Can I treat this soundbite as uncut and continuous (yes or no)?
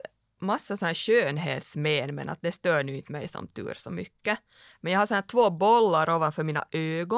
yes